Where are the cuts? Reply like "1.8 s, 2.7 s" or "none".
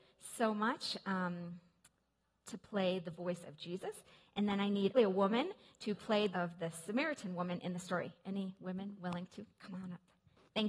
4.9 s, 6.3 s